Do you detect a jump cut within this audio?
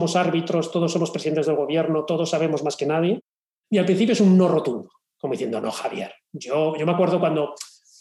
no; 0 cuts

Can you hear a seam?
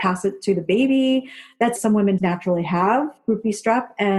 yes; 2 cuts; at 1.8 s, 2.2 s

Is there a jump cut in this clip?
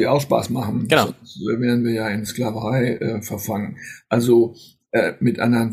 no; 0 cuts

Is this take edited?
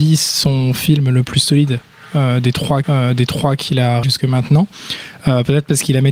yes; 2 cuts; at 2.8 s, 4.0 s

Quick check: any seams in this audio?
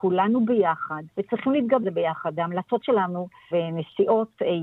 yes; 4 cuts; at 1.1 s, 1.8 s, 2.8 s, 3.5 s

